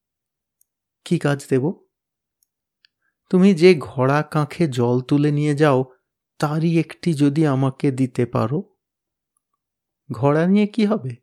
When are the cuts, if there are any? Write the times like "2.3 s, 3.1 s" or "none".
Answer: none